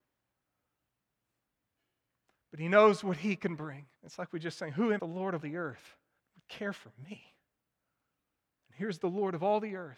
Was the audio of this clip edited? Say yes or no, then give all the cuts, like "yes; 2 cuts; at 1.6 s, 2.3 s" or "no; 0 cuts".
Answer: yes; 4 cuts; at 3.9 s, 5.0 s, 5.4 s, 6.2 s